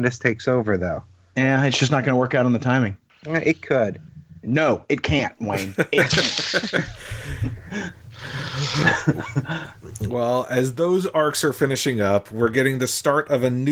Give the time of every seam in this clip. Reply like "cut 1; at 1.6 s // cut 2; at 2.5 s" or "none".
none